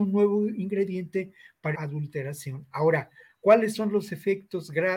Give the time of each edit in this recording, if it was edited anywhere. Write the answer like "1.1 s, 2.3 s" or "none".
1.7 s